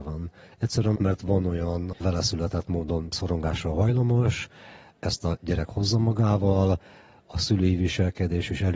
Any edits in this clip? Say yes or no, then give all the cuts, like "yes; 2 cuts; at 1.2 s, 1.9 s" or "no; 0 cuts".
yes; 2 cuts; at 1.0 s, 1.9 s